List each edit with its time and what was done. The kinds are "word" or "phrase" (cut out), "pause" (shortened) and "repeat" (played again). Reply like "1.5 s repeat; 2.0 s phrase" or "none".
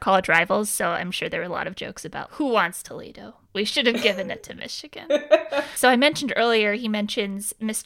2.3 s word